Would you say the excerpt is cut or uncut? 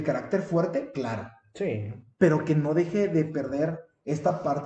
uncut